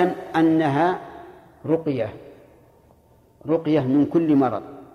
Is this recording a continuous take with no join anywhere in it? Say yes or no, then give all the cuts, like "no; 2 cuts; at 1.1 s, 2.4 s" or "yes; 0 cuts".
yes; 0 cuts